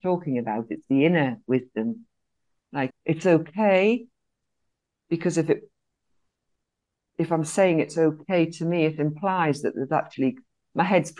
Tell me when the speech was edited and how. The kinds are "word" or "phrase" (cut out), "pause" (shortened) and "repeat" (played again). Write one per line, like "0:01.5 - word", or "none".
0:02.9 - word

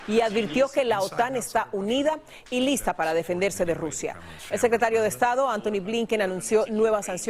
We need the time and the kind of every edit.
none

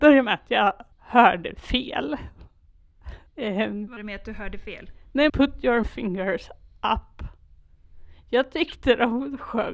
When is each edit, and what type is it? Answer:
0:00.9 - pause
0:03.3 - pause
0:04.0 - word
0:05.3 - phrase
0:05.8 - word

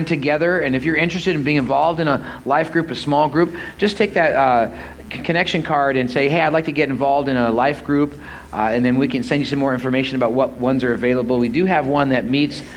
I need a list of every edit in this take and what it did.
none

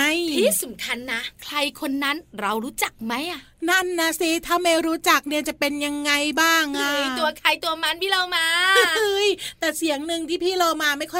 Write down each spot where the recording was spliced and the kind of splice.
0:01.4 - pause

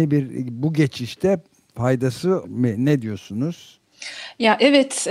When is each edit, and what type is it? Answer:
0:02.4 - word

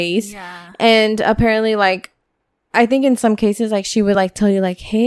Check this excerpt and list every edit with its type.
none

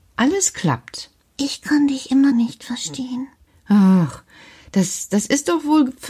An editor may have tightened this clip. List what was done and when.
0:01.2 - pause
0:02.3 - word
0:03.5 - pause

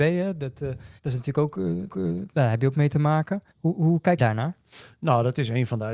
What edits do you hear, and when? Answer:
0:01.0 - pause
0:01.9 - repeat
0:03.5 - pause
0:04.2 - word

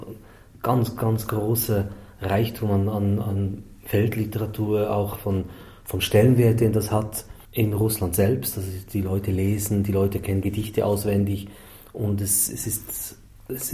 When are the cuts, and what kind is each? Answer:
0:07.4 - word

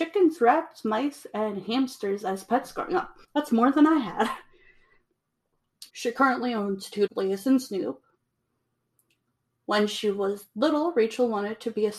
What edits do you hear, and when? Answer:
0:03.2 - pause
0:05.9 - pause
0:07.1 - word

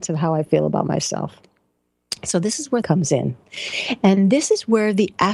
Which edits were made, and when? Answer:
0:02.8 - phrase

